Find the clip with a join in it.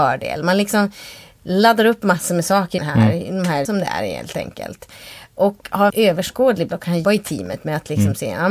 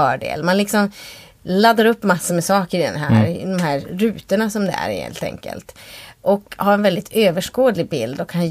first; 5 cuts; at 2.8 s, 3.6 s, 5.9 s, 6.7 s, 7.0 s

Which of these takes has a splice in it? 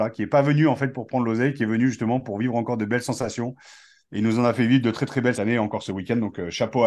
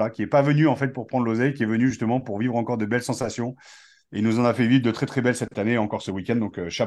first; 1 cut; at 5.3 s

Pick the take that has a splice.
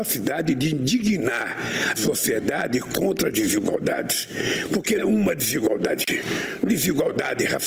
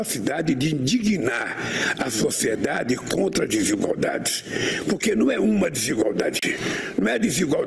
first; 3 cuts; at 1.9 s, 5.0 s, 6.7 s

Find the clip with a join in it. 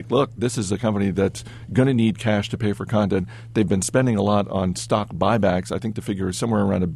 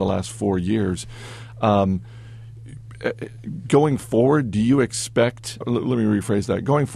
second; 1 cut; at 5.6 s

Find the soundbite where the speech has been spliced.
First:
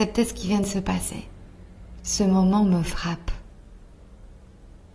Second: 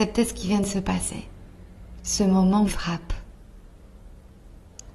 second; 1 cut; at 2.7 s

